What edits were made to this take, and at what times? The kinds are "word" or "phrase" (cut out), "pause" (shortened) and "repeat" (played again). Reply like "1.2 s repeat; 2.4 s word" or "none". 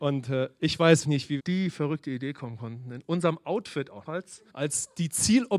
1.0 s word; 1.4 s phrase; 4.1 s word; 4.5 s pause